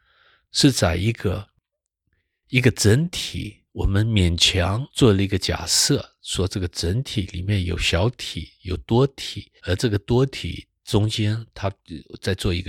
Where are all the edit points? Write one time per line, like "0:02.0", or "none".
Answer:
0:04.9
0:09.6